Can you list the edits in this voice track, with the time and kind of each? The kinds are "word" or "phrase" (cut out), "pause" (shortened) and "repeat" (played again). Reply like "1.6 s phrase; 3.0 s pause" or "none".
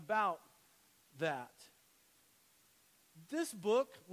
none